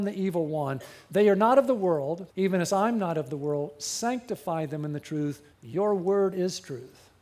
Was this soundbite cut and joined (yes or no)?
yes